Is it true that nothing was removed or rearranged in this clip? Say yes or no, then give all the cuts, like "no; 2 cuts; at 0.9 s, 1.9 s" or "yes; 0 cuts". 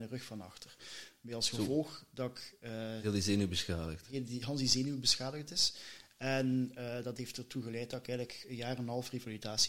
yes; 0 cuts